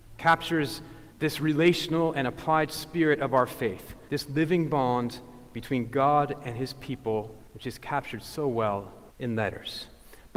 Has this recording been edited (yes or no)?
yes